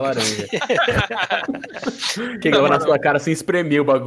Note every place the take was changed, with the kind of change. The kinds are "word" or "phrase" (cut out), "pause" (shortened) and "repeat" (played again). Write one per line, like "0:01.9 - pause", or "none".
0:02.4 - word

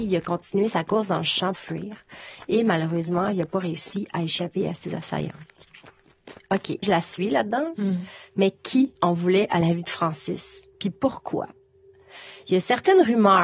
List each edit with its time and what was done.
0:01.5 - word
0:06.8 - word
0:09.0 - pause
0:10.7 - pause

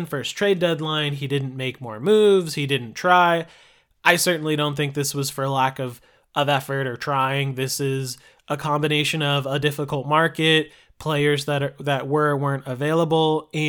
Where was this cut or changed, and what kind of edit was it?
none

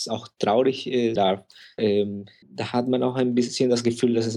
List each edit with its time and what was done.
0:01.2 - word
0:01.8 - word
0:02.4 - word

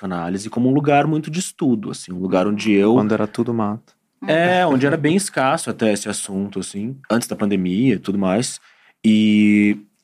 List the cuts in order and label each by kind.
0:07.0 - pause

